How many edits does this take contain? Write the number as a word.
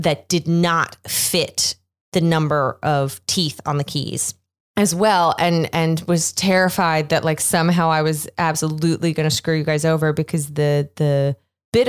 zero